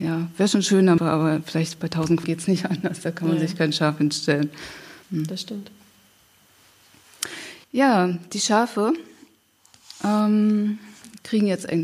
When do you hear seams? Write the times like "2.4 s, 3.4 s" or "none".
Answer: 1.0 s, 2.2 s, 5.0 s, 7.6 s